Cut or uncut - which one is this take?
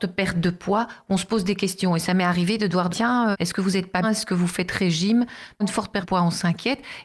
cut